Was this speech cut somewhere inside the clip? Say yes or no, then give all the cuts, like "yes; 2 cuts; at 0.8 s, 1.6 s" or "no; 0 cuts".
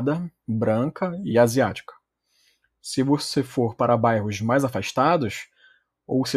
no; 0 cuts